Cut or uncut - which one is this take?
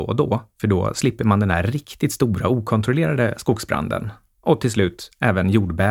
uncut